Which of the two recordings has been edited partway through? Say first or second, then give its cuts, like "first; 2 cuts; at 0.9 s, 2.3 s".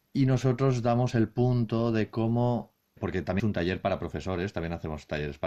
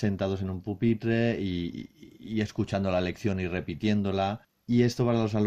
first; 2 cuts; at 3.0 s, 3.4 s